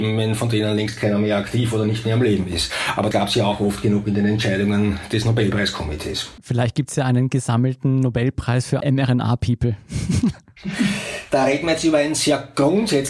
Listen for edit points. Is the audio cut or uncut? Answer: cut